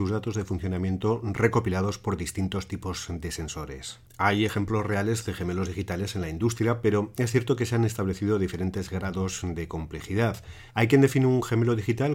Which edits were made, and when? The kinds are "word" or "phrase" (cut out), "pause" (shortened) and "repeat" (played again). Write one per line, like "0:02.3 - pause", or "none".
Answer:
0:10.7 - pause